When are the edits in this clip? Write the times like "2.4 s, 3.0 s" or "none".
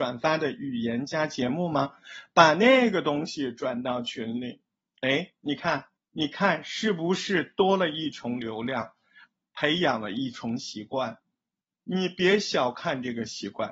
4.8 s, 5.9 s